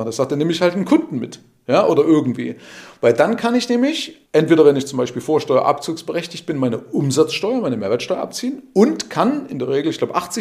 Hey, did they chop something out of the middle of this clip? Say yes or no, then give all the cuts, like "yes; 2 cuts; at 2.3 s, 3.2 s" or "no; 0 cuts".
yes; 1 cut; at 4.2 s